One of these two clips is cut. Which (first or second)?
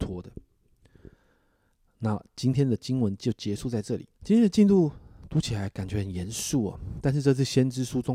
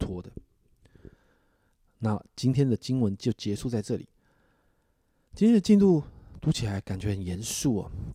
first